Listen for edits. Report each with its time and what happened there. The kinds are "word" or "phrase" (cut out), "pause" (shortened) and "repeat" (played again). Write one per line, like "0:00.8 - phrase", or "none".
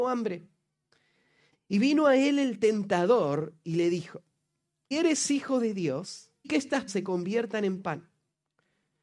0:04.9 - word
0:06.4 - word
0:06.9 - word